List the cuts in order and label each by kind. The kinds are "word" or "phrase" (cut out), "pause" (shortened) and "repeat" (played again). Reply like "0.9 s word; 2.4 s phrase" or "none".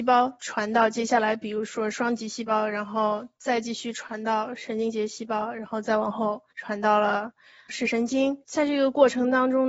6.5 s pause; 7.7 s word